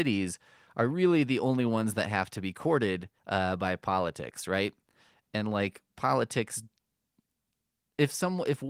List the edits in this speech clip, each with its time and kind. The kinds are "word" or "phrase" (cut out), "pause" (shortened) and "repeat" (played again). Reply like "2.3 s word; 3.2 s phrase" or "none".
3.2 s pause